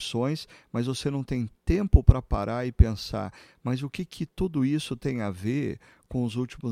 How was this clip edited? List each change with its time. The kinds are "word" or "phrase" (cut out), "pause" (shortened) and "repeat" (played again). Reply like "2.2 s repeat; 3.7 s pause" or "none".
none